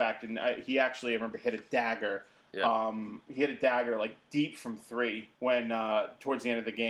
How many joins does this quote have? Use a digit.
1